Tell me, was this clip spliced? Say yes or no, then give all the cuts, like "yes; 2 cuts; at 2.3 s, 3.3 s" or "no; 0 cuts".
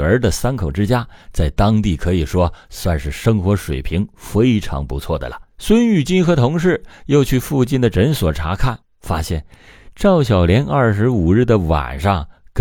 yes; 2 cuts; at 5.5 s, 8.8 s